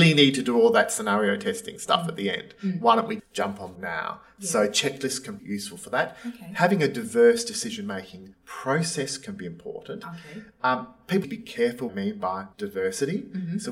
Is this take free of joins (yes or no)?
no